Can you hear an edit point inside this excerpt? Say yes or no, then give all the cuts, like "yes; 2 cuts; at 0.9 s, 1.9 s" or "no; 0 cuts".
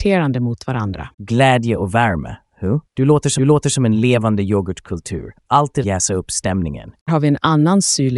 yes; 5 cuts; at 1.1 s, 2.9 s, 3.4 s, 5.8 s, 7.1 s